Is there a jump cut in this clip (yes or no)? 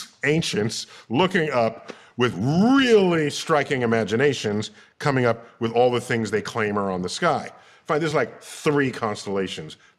no